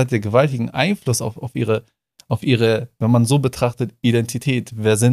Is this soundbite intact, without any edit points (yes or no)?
yes